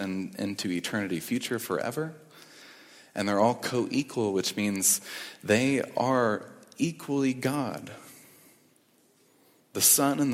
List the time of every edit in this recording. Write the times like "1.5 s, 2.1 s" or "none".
none